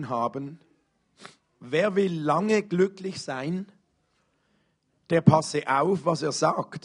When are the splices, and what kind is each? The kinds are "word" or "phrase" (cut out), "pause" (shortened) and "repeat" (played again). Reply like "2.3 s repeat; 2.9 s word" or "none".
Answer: none